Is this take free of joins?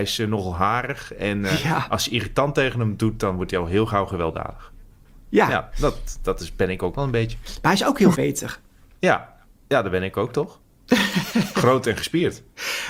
no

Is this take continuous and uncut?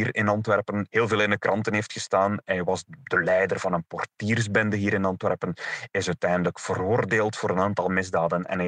yes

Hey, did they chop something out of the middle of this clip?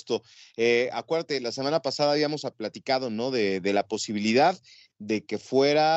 no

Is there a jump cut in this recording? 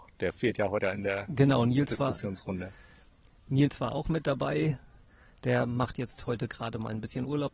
no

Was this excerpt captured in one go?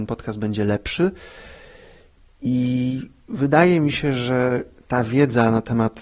yes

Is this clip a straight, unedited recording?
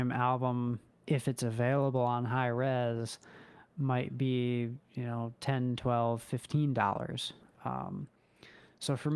no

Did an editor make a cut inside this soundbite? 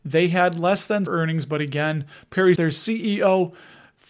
yes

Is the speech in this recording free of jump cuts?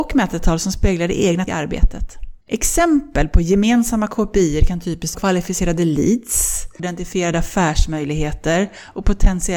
no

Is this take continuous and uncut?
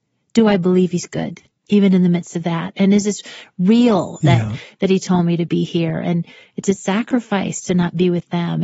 yes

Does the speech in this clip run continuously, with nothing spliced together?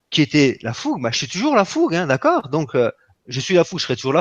yes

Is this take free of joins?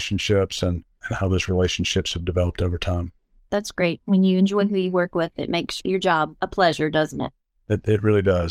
yes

